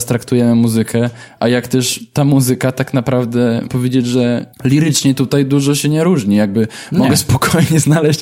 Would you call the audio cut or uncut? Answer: cut